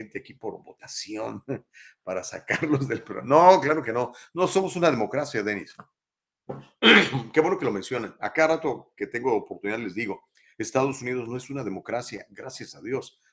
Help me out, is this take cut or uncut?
uncut